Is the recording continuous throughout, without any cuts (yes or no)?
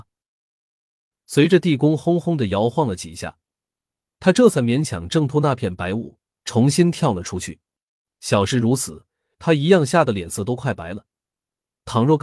no